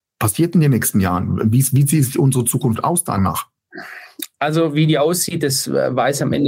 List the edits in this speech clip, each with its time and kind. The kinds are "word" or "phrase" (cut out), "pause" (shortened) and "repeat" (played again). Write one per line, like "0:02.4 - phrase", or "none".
0:03.2 - word